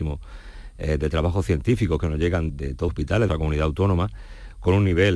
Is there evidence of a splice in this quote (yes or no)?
yes